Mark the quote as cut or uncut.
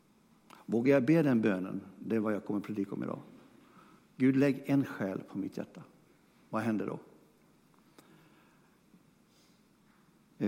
uncut